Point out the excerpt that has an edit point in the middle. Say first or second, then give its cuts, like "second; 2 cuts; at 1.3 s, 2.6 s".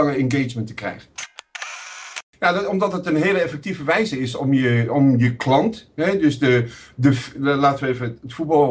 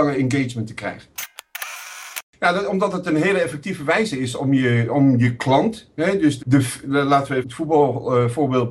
second; 2 cuts; at 6.4 s, 7.4 s